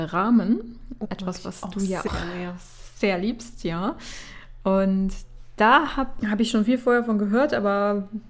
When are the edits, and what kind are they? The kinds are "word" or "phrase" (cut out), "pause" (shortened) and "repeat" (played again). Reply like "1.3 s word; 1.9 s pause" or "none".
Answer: 1.0 s word; 2.1 s word; 6.2 s word